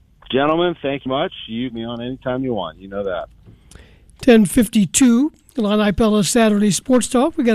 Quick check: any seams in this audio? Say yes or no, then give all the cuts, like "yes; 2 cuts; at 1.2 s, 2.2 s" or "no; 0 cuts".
yes; 2 cuts; at 1.1 s, 1.7 s